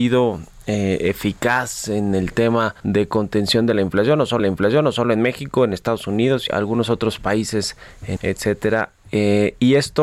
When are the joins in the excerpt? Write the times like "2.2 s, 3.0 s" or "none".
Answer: 2.8 s, 4.4 s, 6.5 s, 8.2 s